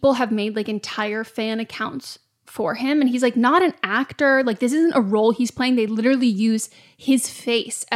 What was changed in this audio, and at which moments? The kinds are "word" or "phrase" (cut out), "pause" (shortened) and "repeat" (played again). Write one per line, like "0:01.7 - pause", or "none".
none